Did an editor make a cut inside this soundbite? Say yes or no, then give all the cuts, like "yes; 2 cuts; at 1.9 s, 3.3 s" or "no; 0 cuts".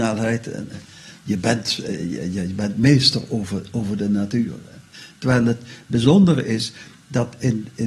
no; 0 cuts